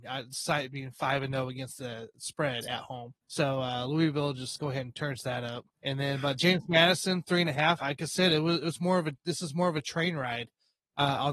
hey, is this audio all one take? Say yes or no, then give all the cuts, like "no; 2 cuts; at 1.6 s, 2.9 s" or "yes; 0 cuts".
no; 4 cuts; at 3.2 s, 4.6 s, 5.7 s, 7.2 s